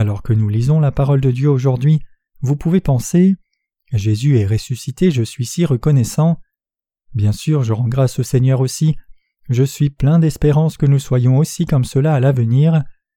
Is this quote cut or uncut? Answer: uncut